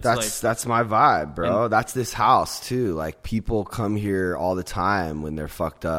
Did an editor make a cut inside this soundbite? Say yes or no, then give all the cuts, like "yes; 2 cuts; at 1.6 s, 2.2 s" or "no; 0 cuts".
no; 0 cuts